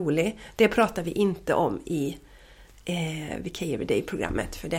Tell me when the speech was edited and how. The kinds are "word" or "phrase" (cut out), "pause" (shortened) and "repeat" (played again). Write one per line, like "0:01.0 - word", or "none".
none